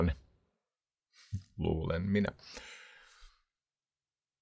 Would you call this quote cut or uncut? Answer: uncut